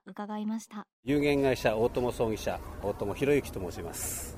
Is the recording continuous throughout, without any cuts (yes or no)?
no